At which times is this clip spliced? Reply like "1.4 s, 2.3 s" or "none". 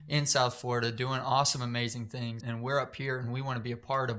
2.4 s